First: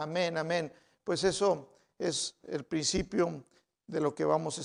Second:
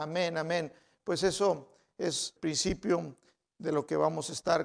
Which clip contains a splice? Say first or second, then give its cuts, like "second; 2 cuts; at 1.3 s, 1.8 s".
second; 1 cut; at 2.4 s